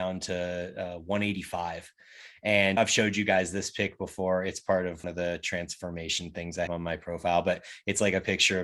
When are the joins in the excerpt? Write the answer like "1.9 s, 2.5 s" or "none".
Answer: 2.8 s, 5.0 s, 6.7 s